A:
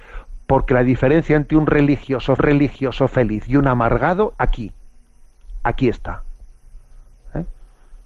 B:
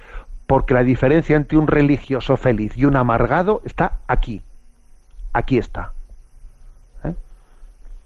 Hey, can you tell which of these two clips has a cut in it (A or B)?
A